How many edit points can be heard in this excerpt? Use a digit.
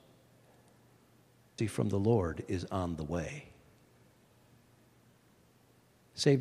1